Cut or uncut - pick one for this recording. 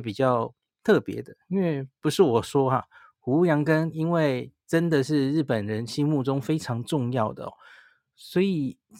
uncut